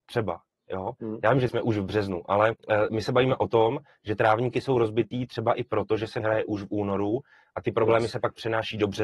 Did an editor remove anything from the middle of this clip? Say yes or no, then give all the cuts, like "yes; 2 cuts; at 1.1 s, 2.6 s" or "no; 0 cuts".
yes; 3 cuts; at 1.5 s, 2.6 s, 6.2 s